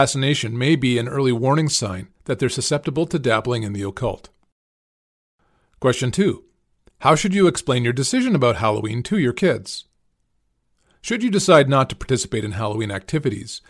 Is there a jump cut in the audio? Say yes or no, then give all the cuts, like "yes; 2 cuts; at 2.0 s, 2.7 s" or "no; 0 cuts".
no; 0 cuts